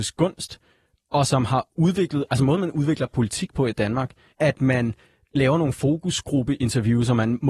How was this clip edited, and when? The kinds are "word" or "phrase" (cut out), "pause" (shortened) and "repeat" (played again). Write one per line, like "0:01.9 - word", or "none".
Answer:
0:04.3 - word